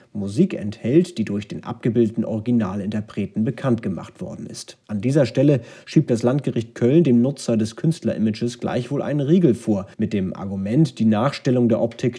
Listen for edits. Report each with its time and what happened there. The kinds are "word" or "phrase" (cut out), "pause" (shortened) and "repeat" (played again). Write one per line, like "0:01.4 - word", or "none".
0:04.8 - pause
0:09.9 - pause